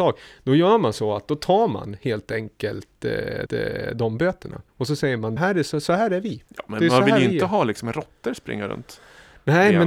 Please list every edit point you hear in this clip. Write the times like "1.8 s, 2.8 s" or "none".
3.5 s, 4.7 s, 5.4 s, 6.5 s